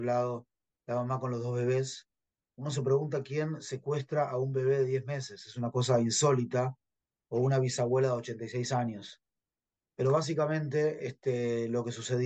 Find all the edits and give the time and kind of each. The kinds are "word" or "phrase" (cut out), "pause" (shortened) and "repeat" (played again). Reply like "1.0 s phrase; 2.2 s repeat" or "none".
none